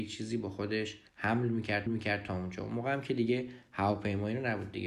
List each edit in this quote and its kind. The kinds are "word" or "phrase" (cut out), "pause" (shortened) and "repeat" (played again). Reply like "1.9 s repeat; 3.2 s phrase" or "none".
1.1 s pause; 1.9 s repeat